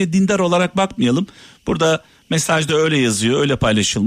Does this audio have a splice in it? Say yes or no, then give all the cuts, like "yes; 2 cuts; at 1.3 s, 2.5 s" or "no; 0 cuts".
no; 0 cuts